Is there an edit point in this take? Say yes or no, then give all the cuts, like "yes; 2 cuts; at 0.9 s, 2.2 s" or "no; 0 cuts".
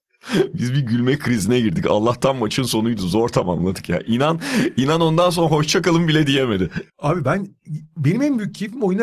yes; 1 cut; at 6.9 s